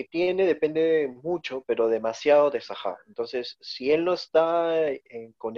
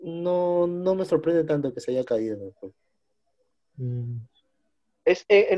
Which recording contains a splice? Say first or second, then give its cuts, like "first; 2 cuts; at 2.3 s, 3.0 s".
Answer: first; 1 cut; at 3.0 s